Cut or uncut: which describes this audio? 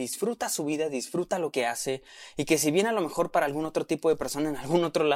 uncut